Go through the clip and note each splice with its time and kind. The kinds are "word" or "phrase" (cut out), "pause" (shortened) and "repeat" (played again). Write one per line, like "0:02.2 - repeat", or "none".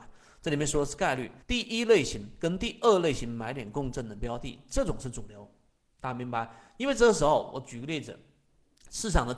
0:01.4 - pause